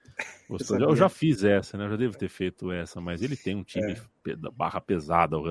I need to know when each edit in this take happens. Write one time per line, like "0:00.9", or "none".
none